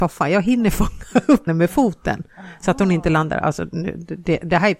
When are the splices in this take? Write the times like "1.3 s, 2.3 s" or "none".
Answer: 1.5 s